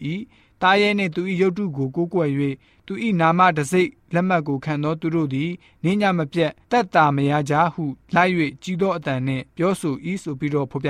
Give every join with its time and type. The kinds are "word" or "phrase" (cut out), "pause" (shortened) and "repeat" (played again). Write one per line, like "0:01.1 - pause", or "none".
none